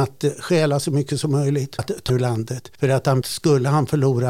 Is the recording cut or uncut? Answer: cut